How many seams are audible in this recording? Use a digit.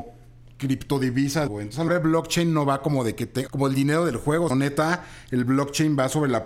4